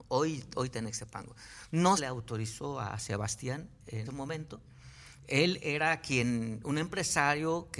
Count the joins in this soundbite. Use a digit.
2